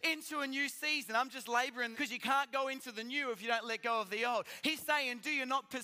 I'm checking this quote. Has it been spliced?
yes; 1 cut; at 1.9 s

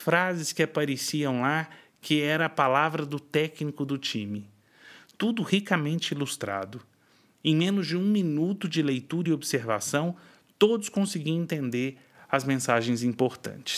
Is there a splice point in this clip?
no; 0 cuts

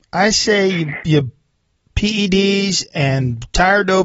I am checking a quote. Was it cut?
no; 0 cuts

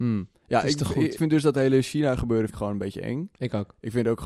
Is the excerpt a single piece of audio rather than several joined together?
no; 2 cuts; at 1.2 s, 2.5 s

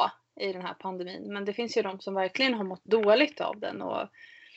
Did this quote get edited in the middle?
no; 0 cuts

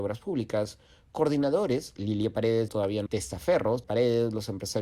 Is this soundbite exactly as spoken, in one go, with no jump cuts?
no; 3 cuts; at 2.7 s, 3.1 s, 3.8 s

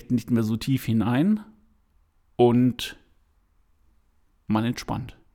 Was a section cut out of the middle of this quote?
no; 0 cuts

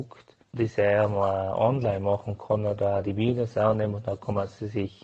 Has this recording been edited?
no; 0 cuts

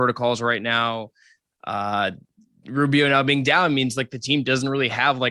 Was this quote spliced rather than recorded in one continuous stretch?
no; 0 cuts

